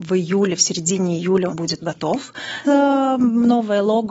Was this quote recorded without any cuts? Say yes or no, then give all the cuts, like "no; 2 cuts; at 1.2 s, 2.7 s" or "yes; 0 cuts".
no; 3 cuts; at 1.5 s, 1.8 s, 2.6 s